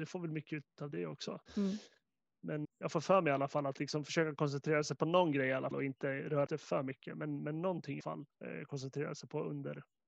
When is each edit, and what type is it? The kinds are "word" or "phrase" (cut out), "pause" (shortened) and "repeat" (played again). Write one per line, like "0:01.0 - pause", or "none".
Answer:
0:01.5 - pause
0:02.6 - word
0:05.7 - word
0:06.5 - word
0:08.0 - word